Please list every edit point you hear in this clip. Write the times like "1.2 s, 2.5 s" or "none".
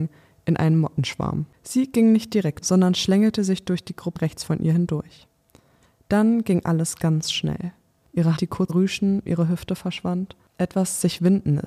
1.5 s, 2.6 s, 4.2 s, 8.4 s, 8.7 s, 9.3 s